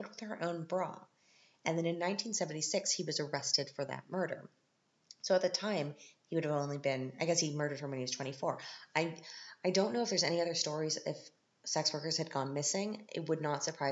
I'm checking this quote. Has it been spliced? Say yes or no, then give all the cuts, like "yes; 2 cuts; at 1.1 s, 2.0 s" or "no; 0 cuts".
no; 0 cuts